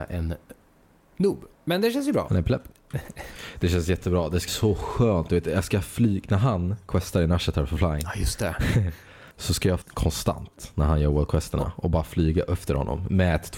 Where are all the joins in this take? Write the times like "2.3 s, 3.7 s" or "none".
1.5 s, 4.5 s, 9.3 s, 9.8 s